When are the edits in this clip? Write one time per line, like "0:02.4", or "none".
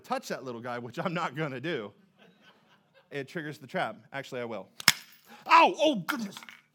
0:03.1